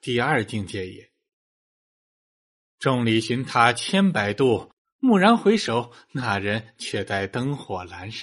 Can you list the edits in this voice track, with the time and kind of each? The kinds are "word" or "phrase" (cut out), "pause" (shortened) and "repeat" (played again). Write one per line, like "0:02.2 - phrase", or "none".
none